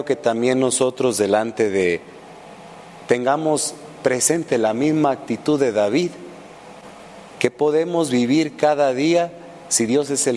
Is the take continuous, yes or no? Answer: yes